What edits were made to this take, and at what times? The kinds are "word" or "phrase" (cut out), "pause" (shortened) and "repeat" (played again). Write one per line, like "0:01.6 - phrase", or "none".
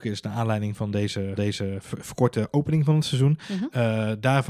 0:01.4 - repeat